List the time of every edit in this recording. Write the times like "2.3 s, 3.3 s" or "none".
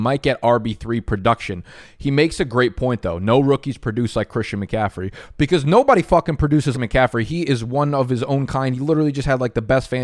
6.7 s